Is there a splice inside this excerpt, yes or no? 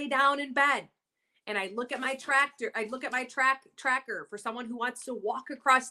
no